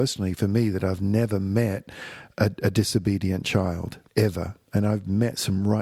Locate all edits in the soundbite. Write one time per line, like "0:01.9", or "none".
0:04.1